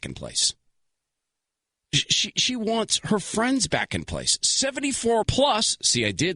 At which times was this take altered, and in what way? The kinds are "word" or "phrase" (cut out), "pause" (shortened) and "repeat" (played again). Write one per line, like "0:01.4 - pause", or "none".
0:05.2 - word